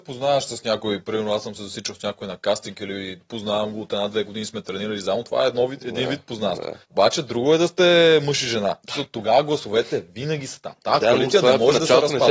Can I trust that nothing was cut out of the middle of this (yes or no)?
no